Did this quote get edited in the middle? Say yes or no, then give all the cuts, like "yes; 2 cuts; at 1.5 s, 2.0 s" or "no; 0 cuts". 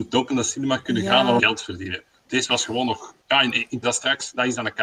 yes; 3 cuts; at 1.4 s, 3.2 s, 3.8 s